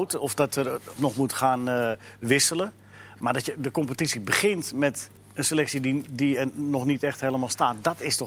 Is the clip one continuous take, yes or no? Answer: no